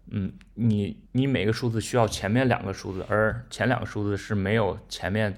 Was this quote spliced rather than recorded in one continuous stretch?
yes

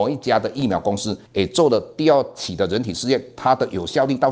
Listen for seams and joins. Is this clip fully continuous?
no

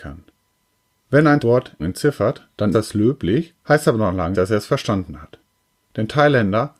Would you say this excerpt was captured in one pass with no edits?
no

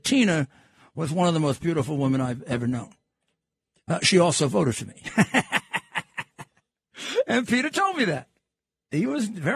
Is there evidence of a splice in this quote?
no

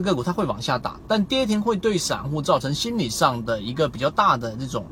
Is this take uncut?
yes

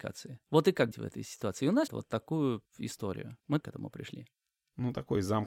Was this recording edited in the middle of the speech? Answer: yes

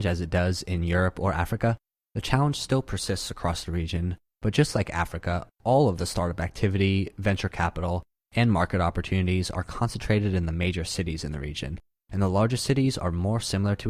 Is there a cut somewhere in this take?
no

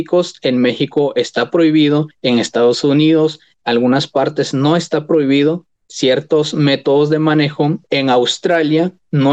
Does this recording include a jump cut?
yes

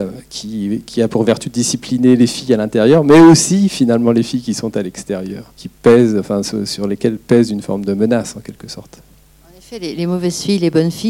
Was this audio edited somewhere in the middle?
yes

